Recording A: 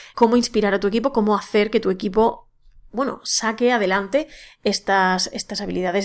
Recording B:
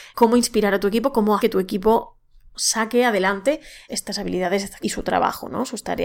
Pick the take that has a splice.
B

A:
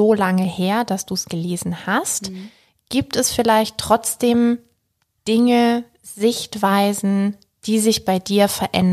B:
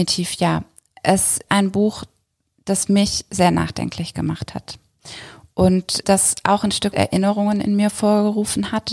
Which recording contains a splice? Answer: B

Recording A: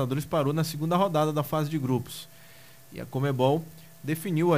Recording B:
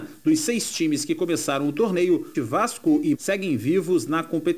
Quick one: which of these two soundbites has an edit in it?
B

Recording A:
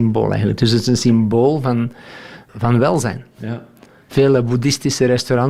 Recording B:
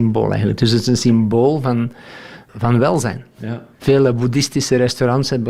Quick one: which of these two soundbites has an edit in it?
B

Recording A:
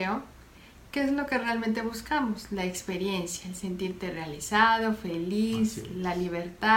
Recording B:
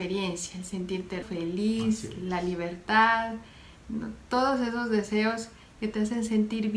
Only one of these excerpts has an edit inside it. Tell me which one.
B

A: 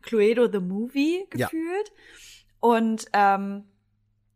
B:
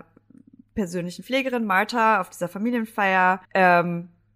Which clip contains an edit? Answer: B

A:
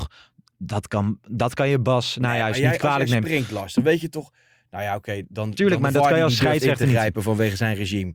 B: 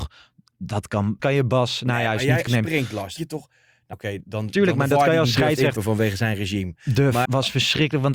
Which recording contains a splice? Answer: B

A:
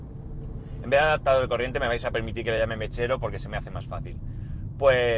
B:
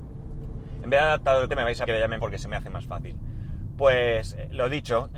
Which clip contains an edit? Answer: B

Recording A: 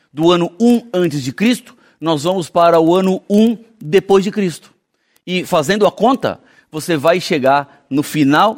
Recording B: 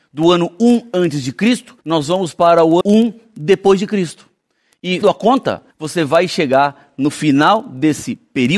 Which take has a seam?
B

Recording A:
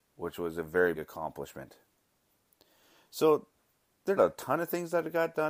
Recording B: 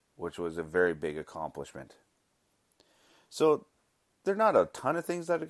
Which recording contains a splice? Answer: A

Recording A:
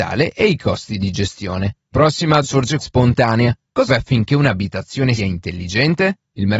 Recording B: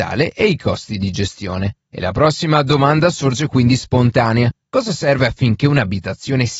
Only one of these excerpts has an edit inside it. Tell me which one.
A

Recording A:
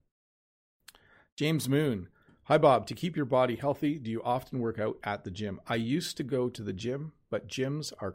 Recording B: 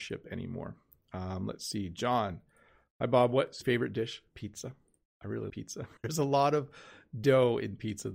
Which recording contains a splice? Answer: B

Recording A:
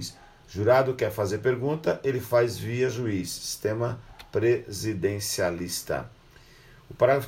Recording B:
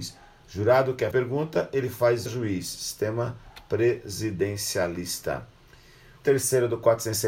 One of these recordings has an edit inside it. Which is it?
B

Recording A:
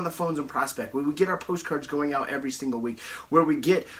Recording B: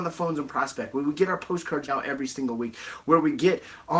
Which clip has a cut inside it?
B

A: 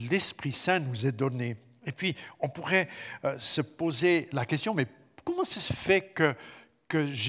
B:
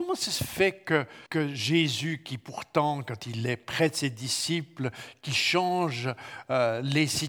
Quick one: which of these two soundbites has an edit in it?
B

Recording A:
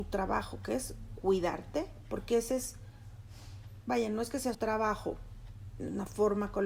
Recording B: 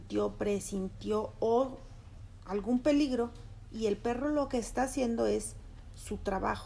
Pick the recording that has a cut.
A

